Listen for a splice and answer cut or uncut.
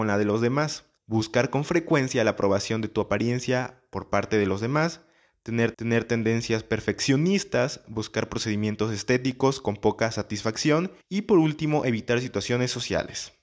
cut